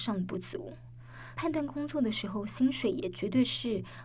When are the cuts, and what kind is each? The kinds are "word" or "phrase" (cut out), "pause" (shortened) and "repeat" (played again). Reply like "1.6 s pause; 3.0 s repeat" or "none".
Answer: 1.4 s phrase